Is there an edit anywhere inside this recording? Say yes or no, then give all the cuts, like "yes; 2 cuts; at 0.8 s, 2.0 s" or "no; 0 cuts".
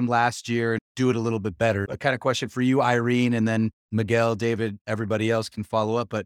yes; 1 cut; at 3.8 s